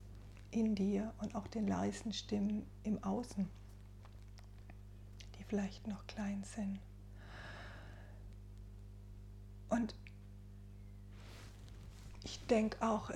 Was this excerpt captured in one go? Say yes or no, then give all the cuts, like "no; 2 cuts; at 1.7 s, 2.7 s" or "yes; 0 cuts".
yes; 0 cuts